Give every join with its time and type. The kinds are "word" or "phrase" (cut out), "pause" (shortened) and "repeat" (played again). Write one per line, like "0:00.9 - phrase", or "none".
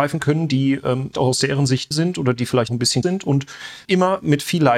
0:01.1 - word
0:01.9 - word
0:02.7 - word
0:03.0 - word
0:03.9 - word